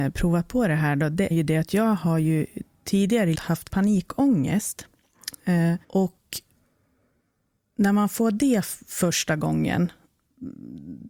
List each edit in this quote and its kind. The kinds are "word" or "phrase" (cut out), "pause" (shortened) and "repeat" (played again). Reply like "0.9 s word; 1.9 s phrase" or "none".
1.3 s word; 3.3 s word; 3.7 s phrase; 5.8 s pause